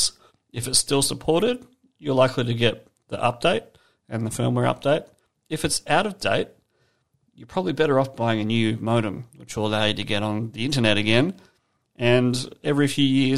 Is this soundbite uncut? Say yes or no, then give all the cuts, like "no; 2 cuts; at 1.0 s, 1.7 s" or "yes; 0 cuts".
yes; 0 cuts